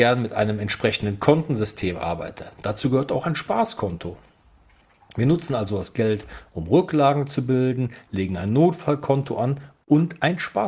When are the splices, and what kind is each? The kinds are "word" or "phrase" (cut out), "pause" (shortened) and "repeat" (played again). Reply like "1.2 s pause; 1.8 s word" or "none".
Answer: none